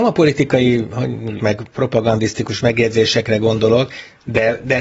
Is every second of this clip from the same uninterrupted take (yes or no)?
no